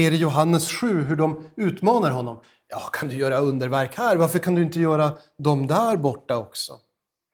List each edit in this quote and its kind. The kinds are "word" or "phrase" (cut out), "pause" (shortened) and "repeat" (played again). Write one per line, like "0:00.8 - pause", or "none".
none